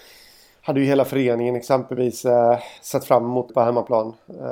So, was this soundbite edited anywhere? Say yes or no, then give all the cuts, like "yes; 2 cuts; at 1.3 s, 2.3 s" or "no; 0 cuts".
yes; 2 cuts; at 2.8 s, 3.5 s